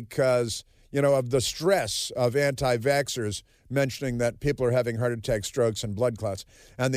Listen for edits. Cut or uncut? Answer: uncut